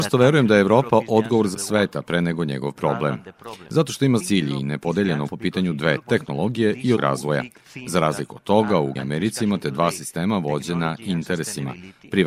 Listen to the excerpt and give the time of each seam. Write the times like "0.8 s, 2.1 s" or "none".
1.5 s, 4.2 s, 5.3 s, 6.0 s, 7.0 s, 9.0 s